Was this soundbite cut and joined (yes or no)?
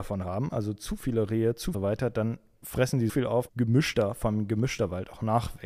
yes